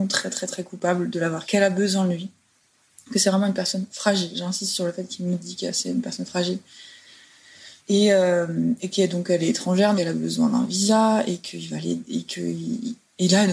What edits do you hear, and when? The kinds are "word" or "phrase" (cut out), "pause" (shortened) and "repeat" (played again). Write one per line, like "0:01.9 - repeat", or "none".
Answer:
0:01.4 - word
0:07.8 - pause
0:10.0 - word